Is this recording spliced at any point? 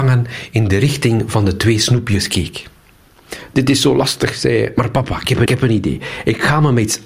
yes; 1 cut; at 5.5 s

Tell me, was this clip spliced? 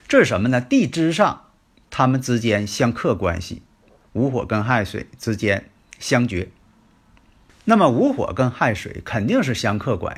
no; 0 cuts

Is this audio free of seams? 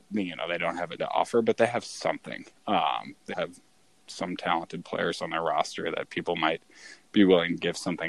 no; 3 cuts; at 1.0 s, 2.6 s, 3.3 s

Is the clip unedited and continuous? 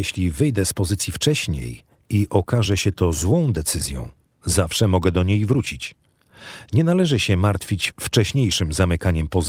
yes; 0 cuts

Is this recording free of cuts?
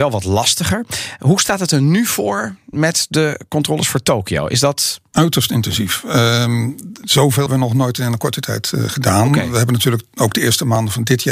no; 1 cut; at 7.5 s

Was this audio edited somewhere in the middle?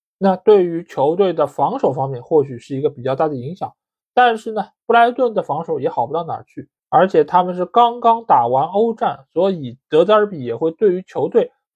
no; 0 cuts

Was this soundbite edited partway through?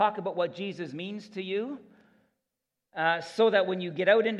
no; 0 cuts

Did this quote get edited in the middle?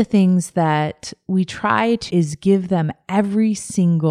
yes; 1 cut; at 2.1 s

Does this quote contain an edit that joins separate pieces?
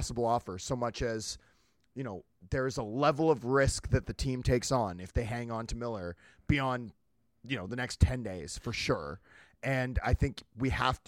no; 0 cuts

